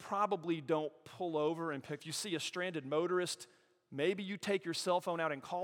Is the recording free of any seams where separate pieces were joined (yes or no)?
no